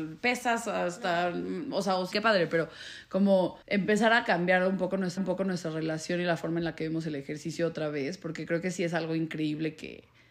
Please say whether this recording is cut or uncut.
cut